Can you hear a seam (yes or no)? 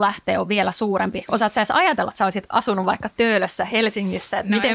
yes